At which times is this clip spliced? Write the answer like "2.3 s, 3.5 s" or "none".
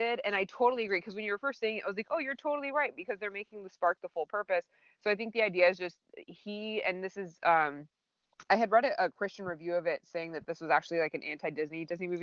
none